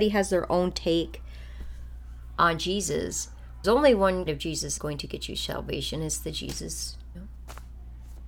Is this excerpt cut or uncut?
cut